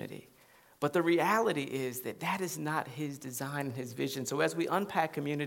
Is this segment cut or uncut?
uncut